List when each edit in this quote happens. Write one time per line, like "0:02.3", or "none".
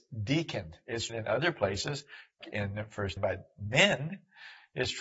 0:01.1
0:02.4
0:03.2